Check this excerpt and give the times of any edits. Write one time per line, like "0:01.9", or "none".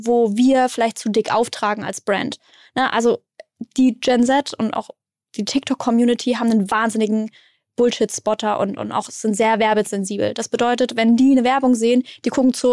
none